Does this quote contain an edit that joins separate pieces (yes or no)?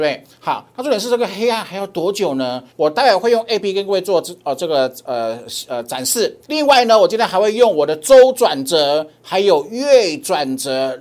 yes